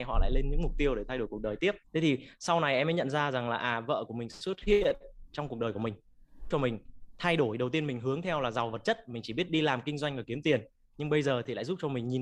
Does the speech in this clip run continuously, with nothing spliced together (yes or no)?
no